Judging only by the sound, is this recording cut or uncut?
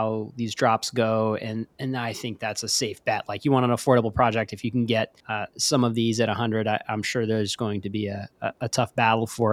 cut